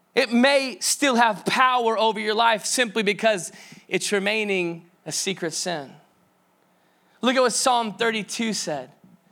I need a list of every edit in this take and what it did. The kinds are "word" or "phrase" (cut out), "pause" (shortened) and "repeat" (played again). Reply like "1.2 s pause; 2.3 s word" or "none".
5.0 s pause